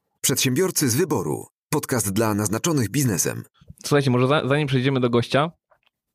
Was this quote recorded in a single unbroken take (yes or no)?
yes